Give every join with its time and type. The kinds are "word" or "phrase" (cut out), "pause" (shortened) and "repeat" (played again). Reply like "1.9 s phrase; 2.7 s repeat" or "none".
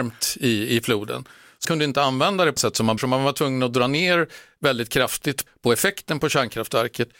1.6 s word; 2.6 s word; 3.0 s word; 5.5 s word